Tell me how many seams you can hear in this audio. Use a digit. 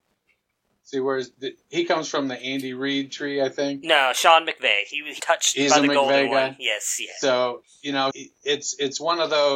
2